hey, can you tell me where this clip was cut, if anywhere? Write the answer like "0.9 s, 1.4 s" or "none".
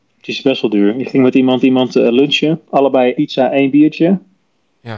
1.6 s, 3.1 s